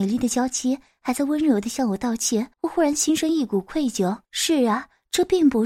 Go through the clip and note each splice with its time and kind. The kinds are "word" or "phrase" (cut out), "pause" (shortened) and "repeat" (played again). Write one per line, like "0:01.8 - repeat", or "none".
0:02.5 - pause
0:04.2 - pause